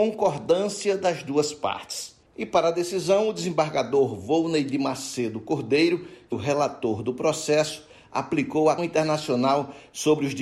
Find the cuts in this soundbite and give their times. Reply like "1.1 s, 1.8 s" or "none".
2.2 s, 6.3 s, 8.8 s